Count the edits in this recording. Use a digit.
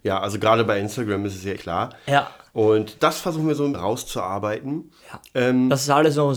4